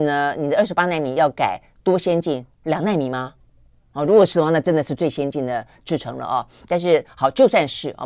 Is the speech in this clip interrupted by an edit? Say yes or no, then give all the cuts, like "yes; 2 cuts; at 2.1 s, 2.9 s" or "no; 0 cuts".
yes; 1 cut; at 2.5 s